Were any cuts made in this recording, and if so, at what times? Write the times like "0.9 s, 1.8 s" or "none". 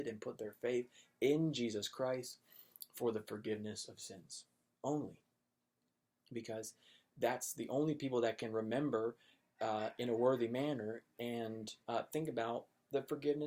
11.8 s